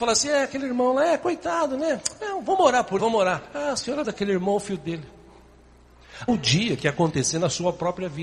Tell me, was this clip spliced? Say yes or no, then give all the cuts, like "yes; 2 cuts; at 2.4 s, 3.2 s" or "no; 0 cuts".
yes; 4 cuts; at 3.0 s, 3.4 s, 4.0 s, 6.3 s